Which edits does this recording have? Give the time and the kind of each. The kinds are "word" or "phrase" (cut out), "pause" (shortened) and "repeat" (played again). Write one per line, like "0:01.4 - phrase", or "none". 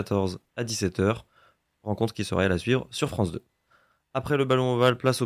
none